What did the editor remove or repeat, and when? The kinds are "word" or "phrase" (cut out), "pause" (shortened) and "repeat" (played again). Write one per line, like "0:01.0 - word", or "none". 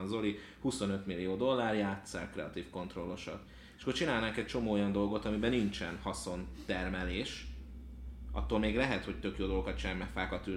none